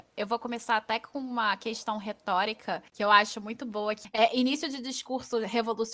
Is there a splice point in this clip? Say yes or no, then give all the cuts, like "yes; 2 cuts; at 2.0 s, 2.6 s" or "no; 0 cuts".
yes; 1 cut; at 2.9 s